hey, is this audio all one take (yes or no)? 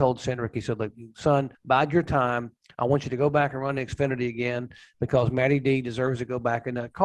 no